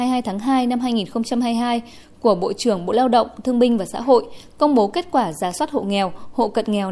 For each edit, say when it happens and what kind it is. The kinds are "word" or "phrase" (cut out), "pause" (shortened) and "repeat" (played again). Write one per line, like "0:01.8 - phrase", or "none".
none